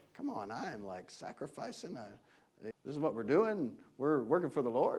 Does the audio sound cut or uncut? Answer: cut